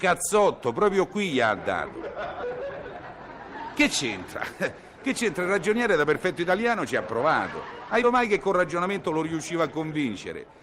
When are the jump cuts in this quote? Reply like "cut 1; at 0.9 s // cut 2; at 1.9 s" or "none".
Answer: cut 1; at 8.0 s